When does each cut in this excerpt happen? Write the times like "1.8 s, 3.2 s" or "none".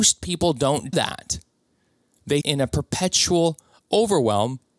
0.9 s, 2.4 s